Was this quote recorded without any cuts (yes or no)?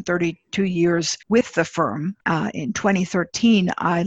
no